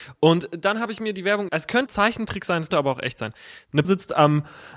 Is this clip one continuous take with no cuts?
no; 4 cuts; at 1.5 s, 1.9 s, 2.7 s, 3.8 s

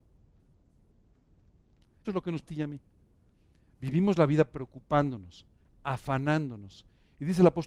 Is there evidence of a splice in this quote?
yes; 2 cuts; at 2.0 s, 2.4 s

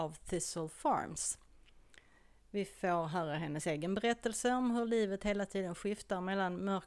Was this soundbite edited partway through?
no; 0 cuts

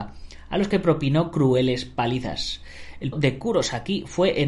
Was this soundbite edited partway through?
yes; 1 cut; at 3.1 s

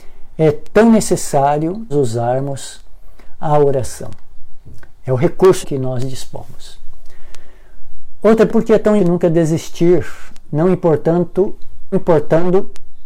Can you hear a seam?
yes; 5 cuts; at 1.9 s, 5.6 s, 8.5 s, 9.0 s, 11.9 s

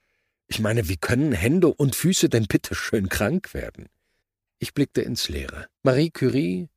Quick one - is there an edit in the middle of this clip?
yes; 2 cuts; at 4.2 s, 5.8 s

